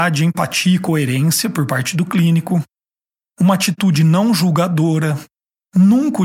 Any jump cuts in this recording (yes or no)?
no